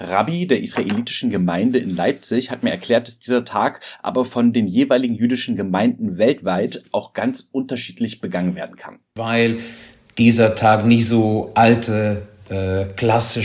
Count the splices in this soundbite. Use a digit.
0